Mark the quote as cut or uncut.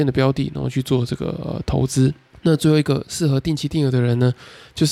cut